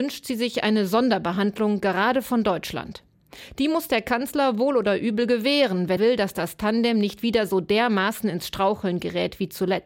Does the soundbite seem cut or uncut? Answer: cut